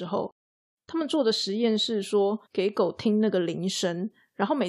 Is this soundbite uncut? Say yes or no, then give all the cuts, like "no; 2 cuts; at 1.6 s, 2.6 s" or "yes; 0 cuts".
no; 1 cut; at 2.5 s